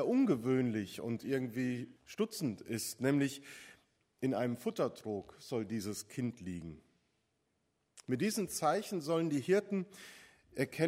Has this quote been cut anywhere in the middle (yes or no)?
yes